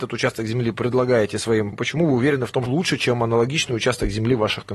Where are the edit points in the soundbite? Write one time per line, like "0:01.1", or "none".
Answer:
0:01.7
0:02.7